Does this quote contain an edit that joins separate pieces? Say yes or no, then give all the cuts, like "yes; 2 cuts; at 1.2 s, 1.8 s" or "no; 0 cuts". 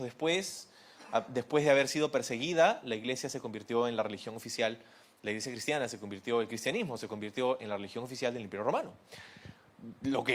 no; 0 cuts